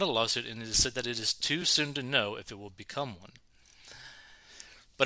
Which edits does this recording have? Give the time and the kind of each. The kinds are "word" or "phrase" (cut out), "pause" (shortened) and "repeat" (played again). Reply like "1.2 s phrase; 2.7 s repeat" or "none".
none

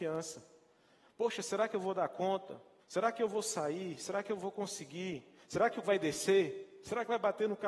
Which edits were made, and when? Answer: 2.8 s pause; 5.8 s word

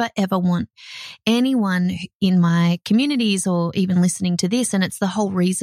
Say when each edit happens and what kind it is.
none

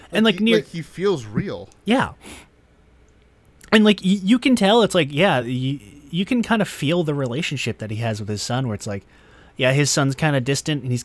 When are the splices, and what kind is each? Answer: none

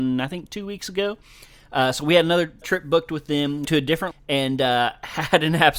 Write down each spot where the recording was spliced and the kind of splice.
2.6 s word; 3.6 s word; 4.1 s word

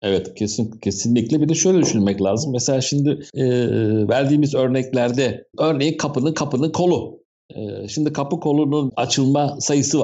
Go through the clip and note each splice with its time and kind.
5.5 s pause; 6.3 s repeat; 8.9 s word

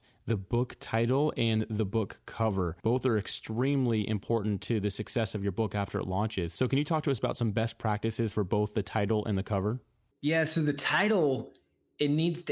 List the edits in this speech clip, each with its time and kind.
2.8 s pause; 10.1 s pause

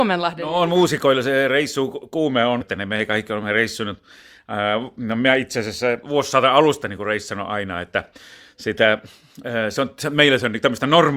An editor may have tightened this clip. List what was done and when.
2.6 s phrase; 6.0 s phrase

